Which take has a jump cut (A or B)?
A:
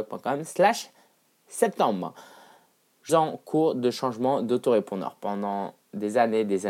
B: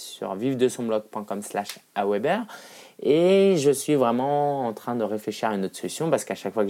A